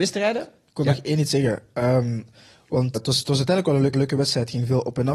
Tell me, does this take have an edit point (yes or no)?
yes